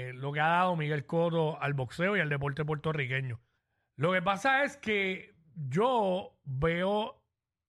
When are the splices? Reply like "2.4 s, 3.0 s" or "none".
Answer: 3.6 s